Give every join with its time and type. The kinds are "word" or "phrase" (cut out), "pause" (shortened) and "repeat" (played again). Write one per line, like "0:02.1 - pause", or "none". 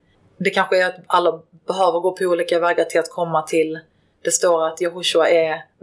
none